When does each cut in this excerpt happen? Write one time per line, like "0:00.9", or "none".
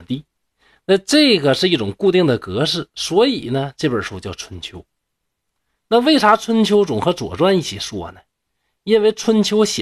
none